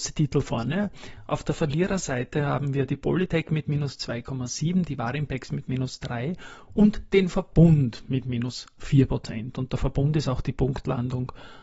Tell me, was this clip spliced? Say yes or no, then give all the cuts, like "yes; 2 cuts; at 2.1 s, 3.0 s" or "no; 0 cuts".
no; 0 cuts